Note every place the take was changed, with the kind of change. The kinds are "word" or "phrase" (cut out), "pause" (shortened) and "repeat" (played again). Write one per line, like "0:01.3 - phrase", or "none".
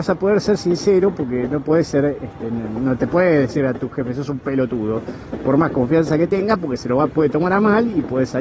none